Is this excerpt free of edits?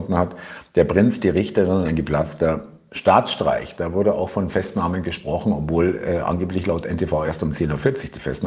yes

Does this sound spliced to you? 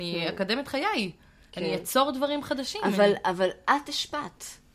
no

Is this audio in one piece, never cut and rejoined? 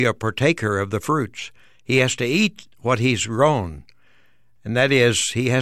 yes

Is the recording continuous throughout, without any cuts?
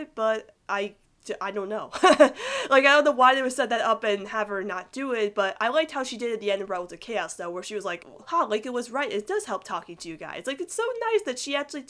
yes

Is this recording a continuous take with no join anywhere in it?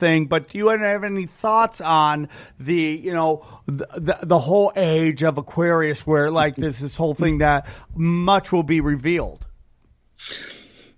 yes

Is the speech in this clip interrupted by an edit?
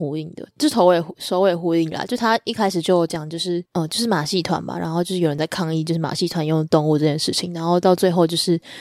yes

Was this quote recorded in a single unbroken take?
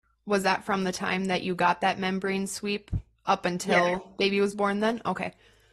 yes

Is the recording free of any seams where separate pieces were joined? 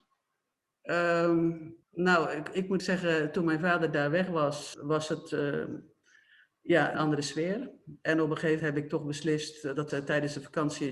no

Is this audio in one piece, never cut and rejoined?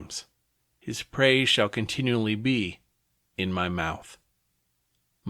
yes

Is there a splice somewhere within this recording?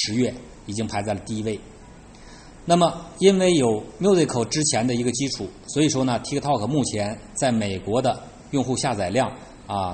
no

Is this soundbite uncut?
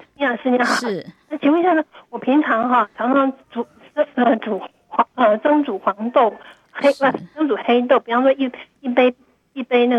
no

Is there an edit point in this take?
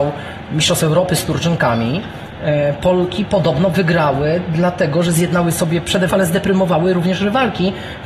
yes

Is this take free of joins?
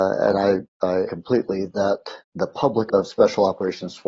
no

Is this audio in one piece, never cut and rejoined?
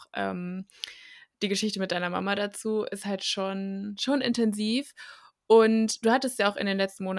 yes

